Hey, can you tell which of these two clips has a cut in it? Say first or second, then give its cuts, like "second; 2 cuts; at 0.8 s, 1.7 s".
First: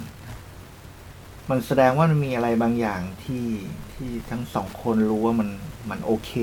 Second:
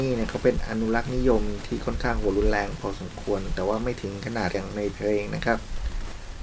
second; 1 cut; at 4.5 s